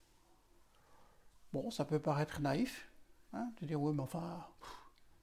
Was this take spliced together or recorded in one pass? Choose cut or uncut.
uncut